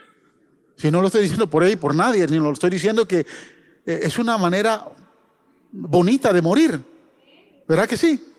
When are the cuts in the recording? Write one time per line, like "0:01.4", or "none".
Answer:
none